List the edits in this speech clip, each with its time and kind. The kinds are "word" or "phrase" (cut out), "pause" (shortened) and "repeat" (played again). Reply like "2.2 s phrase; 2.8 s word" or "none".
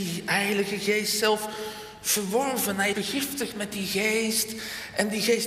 2.9 s word